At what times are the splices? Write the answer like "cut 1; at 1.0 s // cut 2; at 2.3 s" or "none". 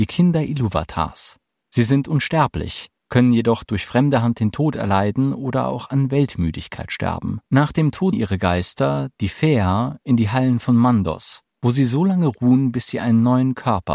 cut 1; at 1.5 s // cut 2; at 3.0 s // cut 3; at 7.5 s // cut 4; at 8.1 s // cut 5; at 11.5 s

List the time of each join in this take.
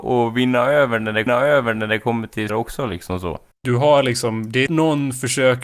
cut 1; at 1.3 s // cut 2; at 2.5 s // cut 3; at 3.5 s // cut 4; at 4.7 s

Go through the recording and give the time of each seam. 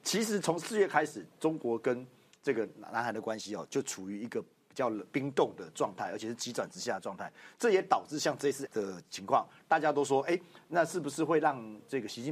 cut 1; at 8.7 s

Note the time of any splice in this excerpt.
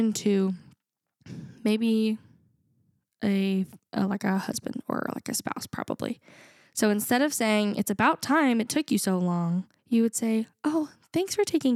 cut 1; at 9.8 s

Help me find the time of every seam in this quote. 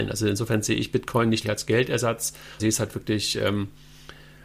cut 1; at 1.4 s // cut 2; at 2.6 s

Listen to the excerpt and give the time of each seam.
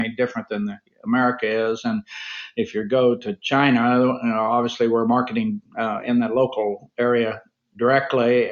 none

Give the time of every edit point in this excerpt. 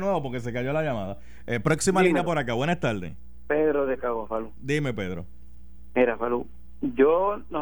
none

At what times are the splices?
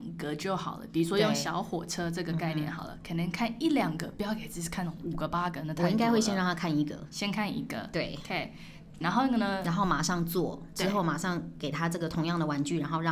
cut 1; at 9.0 s

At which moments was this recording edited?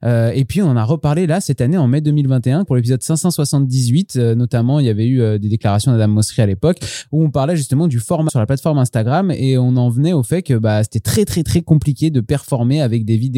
cut 1; at 2.7 s // cut 2; at 8.3 s

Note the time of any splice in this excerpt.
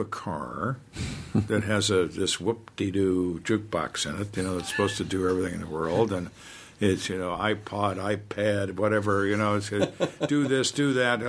none

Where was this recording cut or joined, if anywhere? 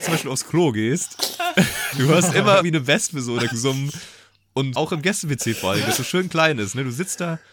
cut 1; at 1.9 s // cut 2; at 2.6 s // cut 3; at 3.5 s // cut 4; at 4.7 s

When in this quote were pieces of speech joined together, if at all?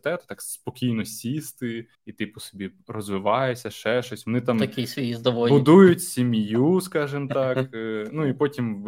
cut 1; at 1.9 s

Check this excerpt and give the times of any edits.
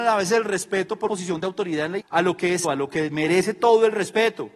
cut 1; at 1.1 s // cut 2; at 2.0 s // cut 3; at 2.6 s

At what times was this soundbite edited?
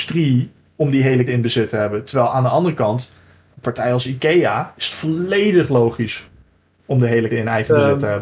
cut 1; at 1.3 s // cut 2; at 7.3 s

